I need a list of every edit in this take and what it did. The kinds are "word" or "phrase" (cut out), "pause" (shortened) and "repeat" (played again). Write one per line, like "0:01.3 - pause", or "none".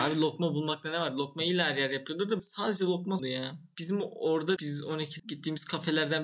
0:02.4 - word
0:03.2 - phrase
0:04.6 - phrase
0:05.2 - phrase